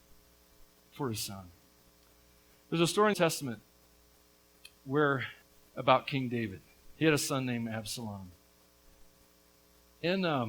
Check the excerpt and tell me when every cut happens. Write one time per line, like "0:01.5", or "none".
0:03.1
0:05.4